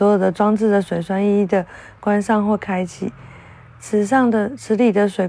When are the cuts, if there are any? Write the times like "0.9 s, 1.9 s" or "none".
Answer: none